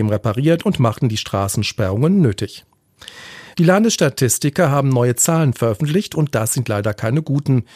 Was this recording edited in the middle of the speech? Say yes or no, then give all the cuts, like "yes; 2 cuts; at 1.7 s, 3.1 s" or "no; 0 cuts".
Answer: no; 0 cuts